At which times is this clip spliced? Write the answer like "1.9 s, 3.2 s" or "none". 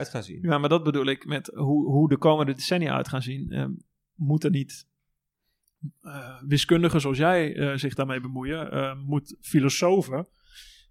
none

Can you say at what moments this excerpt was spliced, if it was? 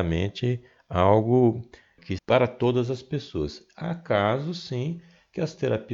2.2 s

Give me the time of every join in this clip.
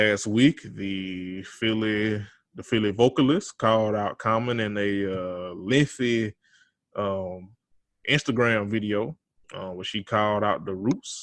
none

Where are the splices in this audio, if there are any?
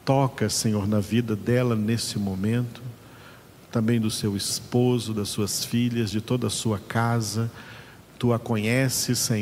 none

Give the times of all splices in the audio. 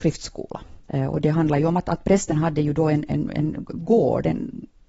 none

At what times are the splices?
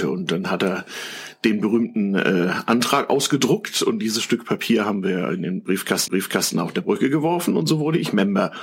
6.1 s

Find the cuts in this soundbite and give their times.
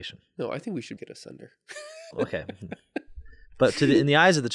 1.0 s, 2.1 s

